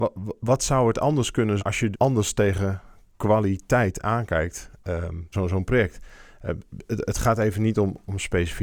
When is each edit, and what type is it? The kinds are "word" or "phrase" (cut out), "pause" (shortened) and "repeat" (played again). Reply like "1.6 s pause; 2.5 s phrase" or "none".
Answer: 1.6 s word; 1.9 s word; 5.3 s phrase